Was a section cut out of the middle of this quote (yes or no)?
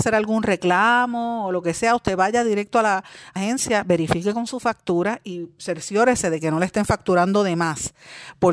yes